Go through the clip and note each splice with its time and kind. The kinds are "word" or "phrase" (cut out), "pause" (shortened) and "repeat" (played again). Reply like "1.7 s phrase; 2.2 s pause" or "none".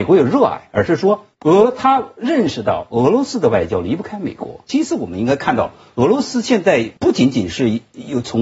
1.3 s pause; 7.0 s pause

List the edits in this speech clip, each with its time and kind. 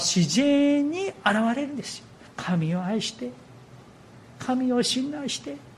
2.3 s pause

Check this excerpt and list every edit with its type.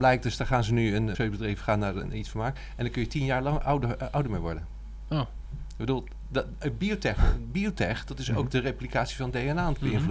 1.1 s word

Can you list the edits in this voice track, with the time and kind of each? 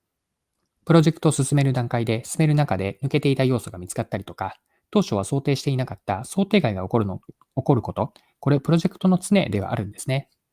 none

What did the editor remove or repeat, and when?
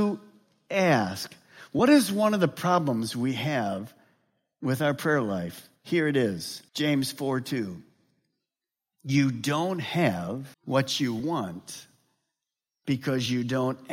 5.8 s pause; 6.7 s pause; 10.5 s pause

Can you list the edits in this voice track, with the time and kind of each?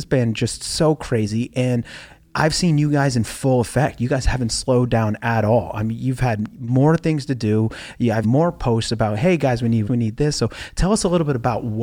8.2 s word; 9.9 s word

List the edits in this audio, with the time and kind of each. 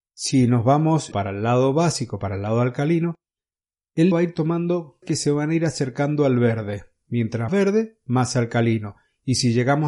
1.1 s word; 4.1 s word; 5.0 s word; 7.5 s word

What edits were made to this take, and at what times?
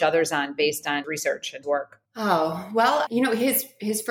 1.0 s word; 1.6 s word; 2.1 s pause; 3.1 s word

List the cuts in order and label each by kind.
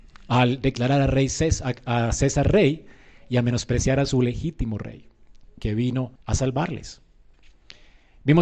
6.2 s word

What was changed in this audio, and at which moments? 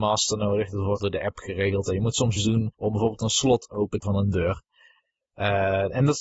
1.0 s word; 2.4 s word; 2.7 s pause; 4.0 s word

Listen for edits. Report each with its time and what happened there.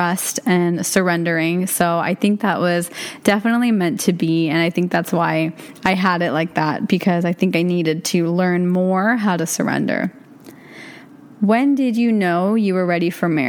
none

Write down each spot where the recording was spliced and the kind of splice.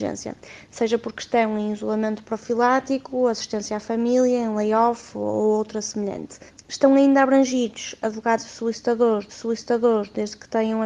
6.5 s pause; 9.3 s repeat

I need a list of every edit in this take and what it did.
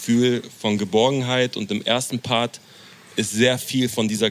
none

